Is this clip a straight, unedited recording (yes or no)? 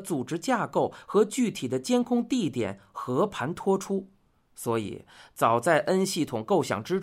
yes